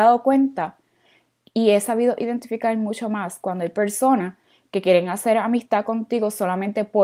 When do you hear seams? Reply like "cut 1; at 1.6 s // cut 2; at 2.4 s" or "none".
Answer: none